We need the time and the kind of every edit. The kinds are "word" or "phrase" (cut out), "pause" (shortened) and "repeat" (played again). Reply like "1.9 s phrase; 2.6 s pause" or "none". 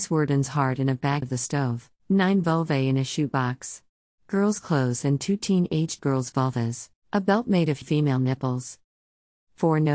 1.2 s phrase; 2.0 s pause; 4.0 s pause; 6.9 s pause; 7.8 s word